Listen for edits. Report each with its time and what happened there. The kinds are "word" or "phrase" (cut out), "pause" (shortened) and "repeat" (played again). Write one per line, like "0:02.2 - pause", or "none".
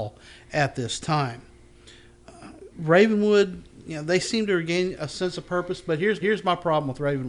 0:02.7 - pause
0:06.2 - repeat